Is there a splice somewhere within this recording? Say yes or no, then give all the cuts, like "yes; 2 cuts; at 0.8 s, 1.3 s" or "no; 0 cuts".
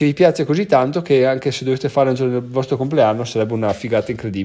no; 0 cuts